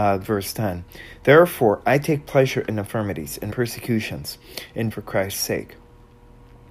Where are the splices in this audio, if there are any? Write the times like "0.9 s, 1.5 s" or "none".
3.5 s, 4.9 s